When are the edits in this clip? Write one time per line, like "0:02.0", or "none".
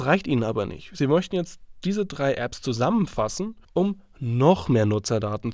0:03.6